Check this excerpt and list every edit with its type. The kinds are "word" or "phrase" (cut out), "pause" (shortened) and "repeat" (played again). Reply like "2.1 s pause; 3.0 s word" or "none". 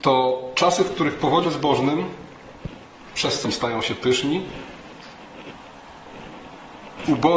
1.4 s word; 3.4 s word